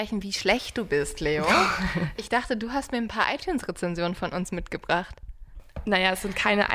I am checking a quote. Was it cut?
yes; 1 cut; at 2.2 s

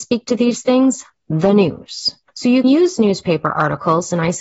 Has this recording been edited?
yes; 2 cuts; at 2.3 s, 2.6 s

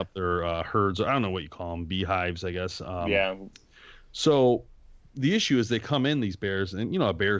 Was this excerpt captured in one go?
yes; 0 cuts

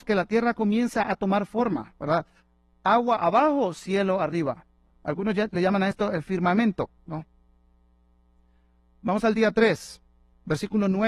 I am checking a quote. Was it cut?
no; 0 cuts

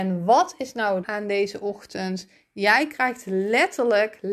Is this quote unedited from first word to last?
no; 1 cut; at 1.0 s

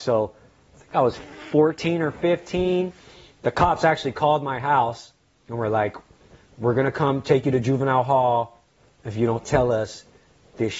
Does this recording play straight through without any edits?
yes; 0 cuts

